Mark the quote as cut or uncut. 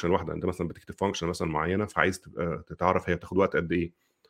uncut